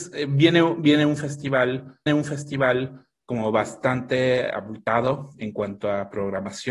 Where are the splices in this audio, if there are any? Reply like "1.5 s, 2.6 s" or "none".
2.1 s

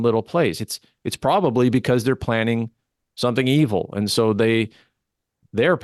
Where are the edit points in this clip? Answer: none

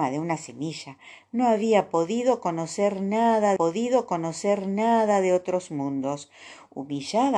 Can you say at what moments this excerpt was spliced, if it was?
3.6 s

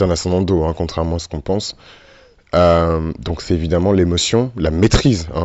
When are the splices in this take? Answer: none

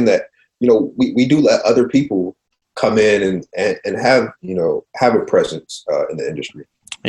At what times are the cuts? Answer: none

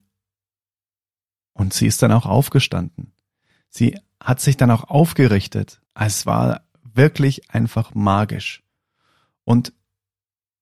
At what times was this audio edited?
5.9 s

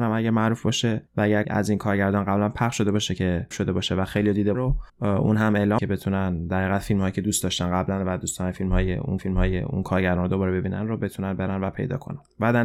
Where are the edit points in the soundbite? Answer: 1.1 s, 1.4 s, 3.5 s, 4.5 s, 4.9 s, 5.8 s, 9.2 s

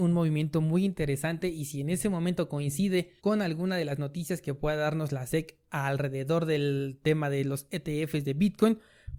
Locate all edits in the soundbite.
3.2 s

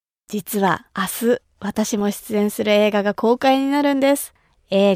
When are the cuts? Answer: 0.9 s

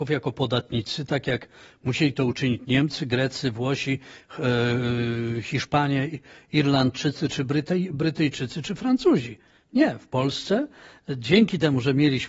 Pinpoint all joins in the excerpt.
none

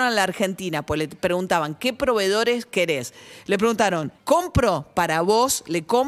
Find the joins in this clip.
4.1 s

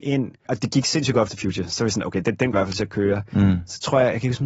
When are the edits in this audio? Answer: 1.3 s, 2.5 s

